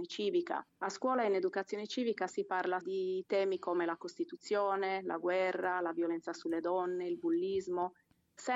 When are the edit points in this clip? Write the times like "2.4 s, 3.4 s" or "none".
2.8 s